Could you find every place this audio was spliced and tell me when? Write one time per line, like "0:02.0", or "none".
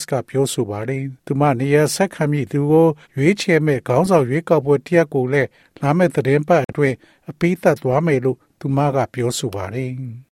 0:01.2
0:03.0